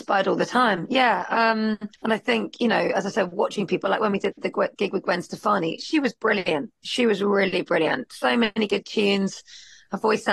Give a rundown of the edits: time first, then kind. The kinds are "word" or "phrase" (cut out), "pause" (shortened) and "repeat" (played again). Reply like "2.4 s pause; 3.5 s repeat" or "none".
1.9 s pause